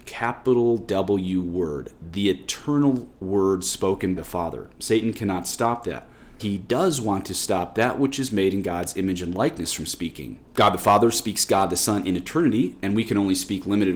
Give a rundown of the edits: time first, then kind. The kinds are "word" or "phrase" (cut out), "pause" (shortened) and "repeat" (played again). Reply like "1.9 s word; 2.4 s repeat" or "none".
4.2 s word; 4.7 s pause; 6.4 s word